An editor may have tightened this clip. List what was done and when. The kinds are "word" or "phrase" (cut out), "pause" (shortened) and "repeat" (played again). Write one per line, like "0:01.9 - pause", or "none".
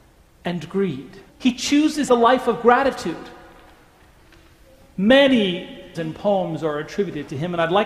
0:01.3 - pause
0:02.1 - word
0:05.9 - word